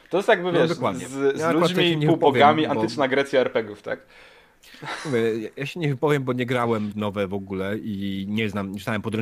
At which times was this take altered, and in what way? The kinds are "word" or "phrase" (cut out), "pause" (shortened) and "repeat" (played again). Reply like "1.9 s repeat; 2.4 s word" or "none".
6.9 s phrase